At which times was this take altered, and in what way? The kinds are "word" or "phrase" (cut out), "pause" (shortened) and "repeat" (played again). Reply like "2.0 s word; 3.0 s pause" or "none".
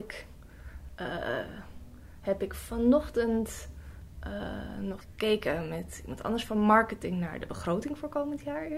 5.0 s word

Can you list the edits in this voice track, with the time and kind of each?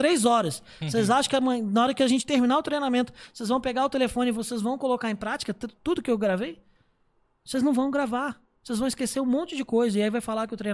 none

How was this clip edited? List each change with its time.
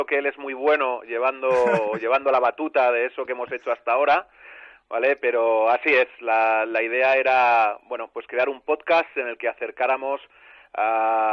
none

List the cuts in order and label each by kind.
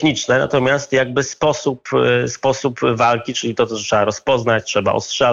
none

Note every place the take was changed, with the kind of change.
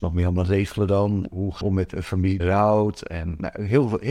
1.6 s word; 2.4 s word

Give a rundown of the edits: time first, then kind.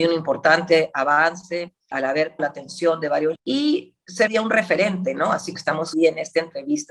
1.9 s word; 2.4 s word; 3.4 s word; 4.3 s word; 5.5 s word; 5.9 s word

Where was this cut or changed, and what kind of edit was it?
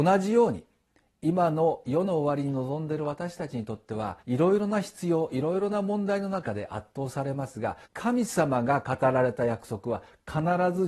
4.2 s pause; 7.8 s pause

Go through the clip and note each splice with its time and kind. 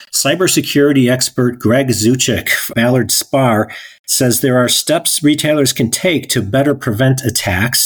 2.7 s word

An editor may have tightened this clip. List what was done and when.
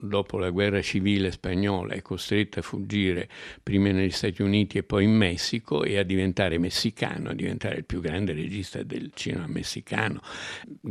none

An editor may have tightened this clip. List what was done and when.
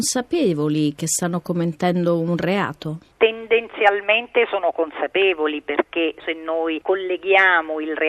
6.2 s word

